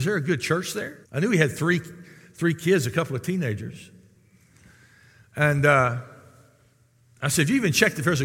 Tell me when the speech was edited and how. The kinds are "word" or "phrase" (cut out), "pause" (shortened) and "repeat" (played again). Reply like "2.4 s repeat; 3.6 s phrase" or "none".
1.0 s pause